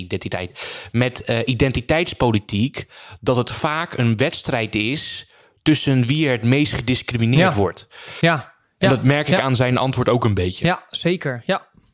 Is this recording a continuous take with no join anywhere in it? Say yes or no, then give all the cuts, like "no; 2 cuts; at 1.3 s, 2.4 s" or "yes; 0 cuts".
yes; 0 cuts